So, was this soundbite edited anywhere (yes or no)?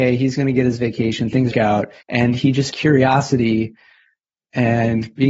yes